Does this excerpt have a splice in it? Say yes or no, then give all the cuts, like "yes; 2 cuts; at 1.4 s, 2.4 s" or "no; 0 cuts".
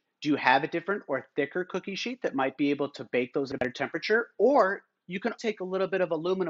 yes; 1 cut; at 5.4 s